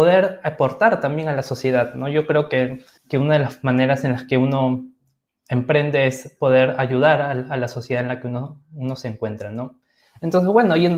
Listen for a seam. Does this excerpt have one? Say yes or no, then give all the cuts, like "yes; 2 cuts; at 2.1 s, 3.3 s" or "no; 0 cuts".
yes; 1 cut; at 3.0 s